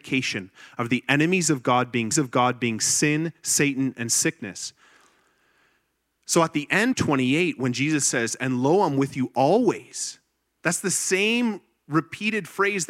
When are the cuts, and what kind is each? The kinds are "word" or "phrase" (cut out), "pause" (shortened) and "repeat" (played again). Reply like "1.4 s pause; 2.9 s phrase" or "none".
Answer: 2.1 s repeat; 6.9 s phrase